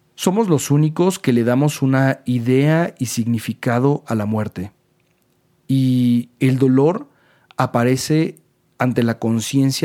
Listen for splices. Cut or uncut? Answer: uncut